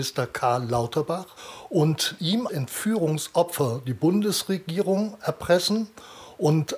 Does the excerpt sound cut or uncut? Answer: cut